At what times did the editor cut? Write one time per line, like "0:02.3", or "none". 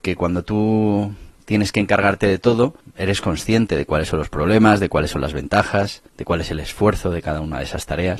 0:02.8
0:06.1